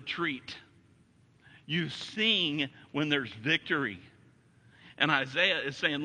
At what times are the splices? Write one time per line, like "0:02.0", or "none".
none